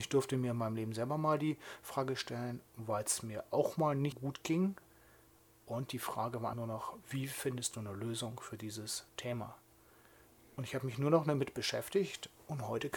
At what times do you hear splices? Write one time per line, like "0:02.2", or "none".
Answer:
0:02.7
0:04.1
0:06.5
0:09.1